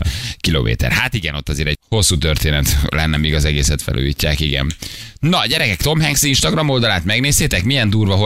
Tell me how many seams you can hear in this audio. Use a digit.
1